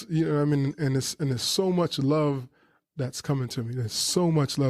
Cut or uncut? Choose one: uncut